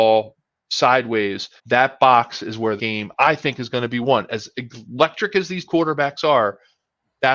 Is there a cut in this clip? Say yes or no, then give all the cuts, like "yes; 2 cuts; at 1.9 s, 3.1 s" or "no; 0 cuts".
yes; 3 cuts; at 1.6 s, 2.8 s, 5.6 s